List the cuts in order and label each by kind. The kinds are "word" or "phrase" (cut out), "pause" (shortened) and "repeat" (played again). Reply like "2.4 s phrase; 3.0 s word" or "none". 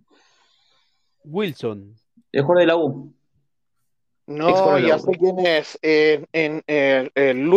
none